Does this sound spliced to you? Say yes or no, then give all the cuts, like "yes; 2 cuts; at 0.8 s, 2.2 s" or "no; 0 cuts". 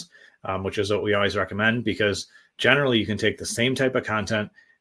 no; 0 cuts